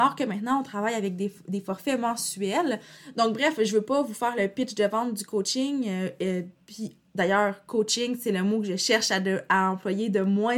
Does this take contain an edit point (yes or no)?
no